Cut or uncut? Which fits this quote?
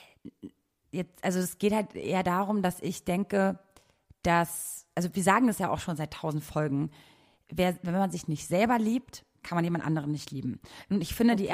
uncut